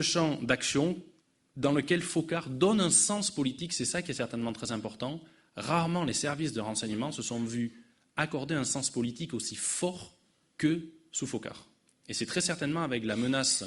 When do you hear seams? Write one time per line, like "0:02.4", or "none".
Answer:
none